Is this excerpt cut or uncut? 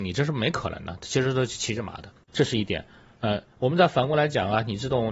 uncut